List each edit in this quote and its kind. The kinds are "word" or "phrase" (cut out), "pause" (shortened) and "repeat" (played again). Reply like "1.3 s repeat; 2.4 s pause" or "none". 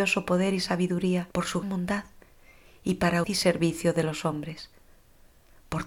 1.3 s pause; 1.6 s word; 3.2 s word